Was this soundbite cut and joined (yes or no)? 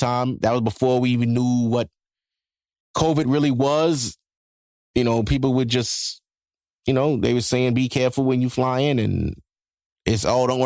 no